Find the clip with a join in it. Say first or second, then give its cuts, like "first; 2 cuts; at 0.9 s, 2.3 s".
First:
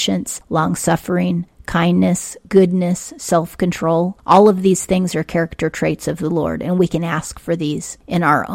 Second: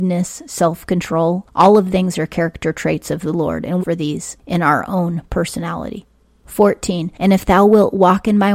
second; 2 cuts; at 1.9 s, 3.8 s